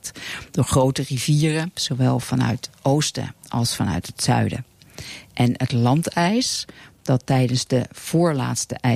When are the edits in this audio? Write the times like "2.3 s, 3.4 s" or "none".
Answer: none